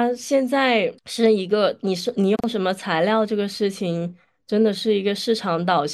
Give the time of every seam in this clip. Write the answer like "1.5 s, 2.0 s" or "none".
1.0 s